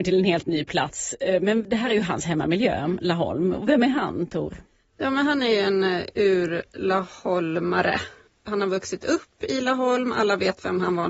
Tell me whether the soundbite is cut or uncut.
uncut